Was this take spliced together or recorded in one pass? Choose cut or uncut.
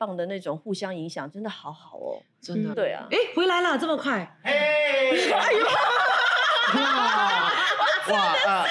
cut